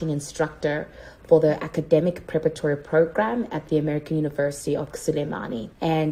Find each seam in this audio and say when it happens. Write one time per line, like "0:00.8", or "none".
0:04.9